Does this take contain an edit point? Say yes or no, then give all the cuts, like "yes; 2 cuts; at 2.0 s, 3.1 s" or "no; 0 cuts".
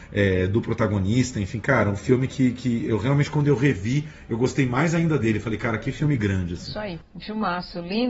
no; 0 cuts